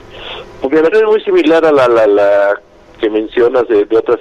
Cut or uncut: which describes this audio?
cut